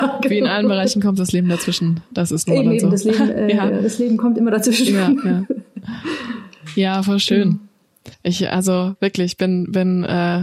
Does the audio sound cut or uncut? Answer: cut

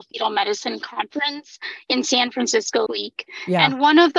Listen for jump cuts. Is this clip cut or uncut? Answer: cut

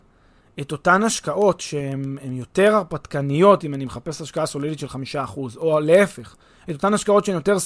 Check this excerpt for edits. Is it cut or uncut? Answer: uncut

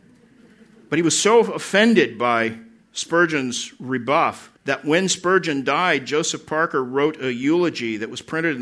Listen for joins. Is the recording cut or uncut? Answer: cut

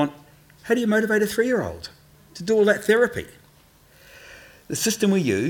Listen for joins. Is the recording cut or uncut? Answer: uncut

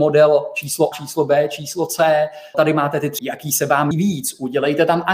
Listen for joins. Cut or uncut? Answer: cut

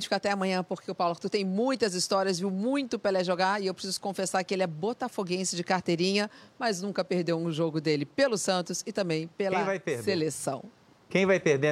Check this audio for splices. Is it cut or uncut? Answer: uncut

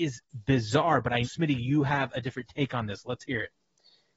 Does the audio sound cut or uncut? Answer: cut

